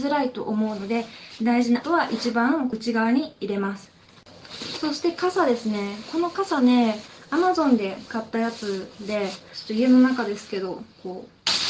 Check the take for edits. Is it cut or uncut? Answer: cut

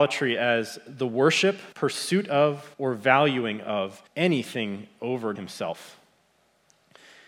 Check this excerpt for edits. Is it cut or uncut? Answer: cut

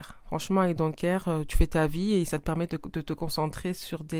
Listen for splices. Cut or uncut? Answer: uncut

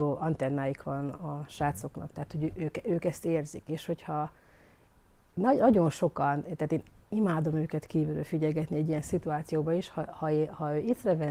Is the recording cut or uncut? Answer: uncut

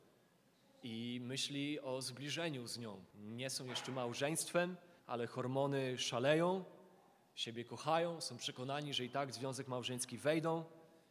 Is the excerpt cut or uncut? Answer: cut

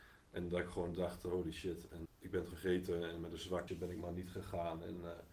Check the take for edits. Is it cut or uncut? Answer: cut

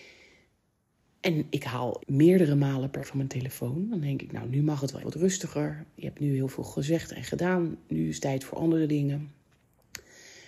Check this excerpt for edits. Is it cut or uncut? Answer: cut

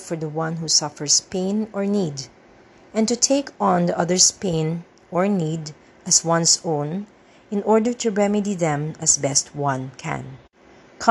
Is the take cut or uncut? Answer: uncut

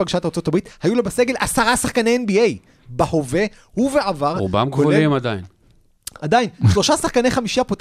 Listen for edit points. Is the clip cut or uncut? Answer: uncut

